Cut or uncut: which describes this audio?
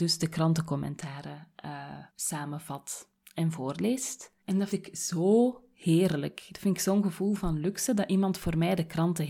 cut